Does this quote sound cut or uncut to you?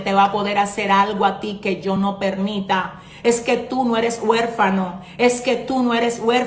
uncut